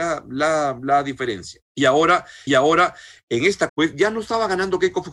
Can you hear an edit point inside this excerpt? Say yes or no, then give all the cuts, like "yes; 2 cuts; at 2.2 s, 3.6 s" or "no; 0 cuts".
yes; 3 cuts; at 1.7 s, 2.5 s, 3.7 s